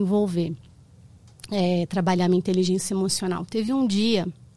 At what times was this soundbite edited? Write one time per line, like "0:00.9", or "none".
none